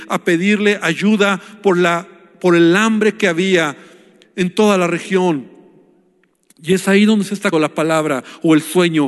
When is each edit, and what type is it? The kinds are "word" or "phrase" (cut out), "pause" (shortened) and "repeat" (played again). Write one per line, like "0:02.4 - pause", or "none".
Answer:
0:07.5 - word